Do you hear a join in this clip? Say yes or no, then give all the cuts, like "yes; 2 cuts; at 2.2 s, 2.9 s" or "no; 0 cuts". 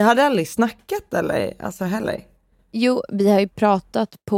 no; 0 cuts